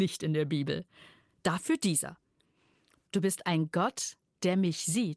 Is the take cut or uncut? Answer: uncut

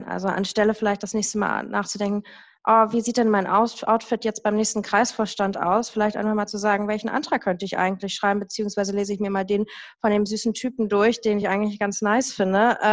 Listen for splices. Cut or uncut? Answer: uncut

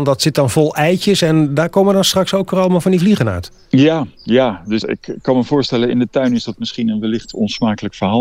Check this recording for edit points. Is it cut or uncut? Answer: cut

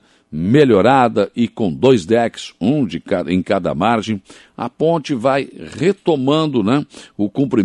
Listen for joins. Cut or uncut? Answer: uncut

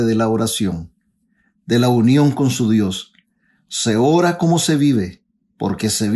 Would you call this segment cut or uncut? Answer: uncut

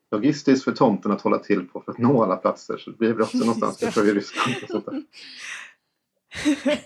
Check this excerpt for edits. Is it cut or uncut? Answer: uncut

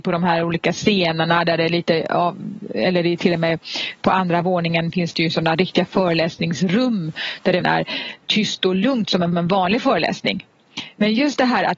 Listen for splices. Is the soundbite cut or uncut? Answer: cut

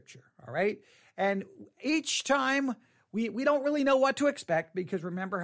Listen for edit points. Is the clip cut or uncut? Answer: uncut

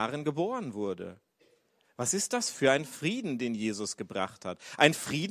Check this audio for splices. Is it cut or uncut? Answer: uncut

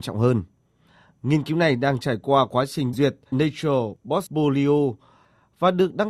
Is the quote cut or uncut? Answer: cut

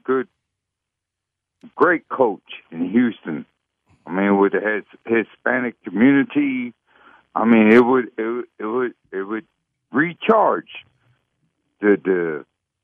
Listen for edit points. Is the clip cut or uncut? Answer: uncut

